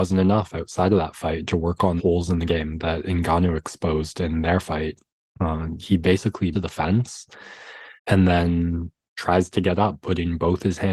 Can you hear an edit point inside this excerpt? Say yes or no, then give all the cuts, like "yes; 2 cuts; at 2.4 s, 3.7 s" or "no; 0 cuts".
yes; 5 cuts; at 2.0 s, 2.5 s, 5.1 s, 6.5 s, 8.0 s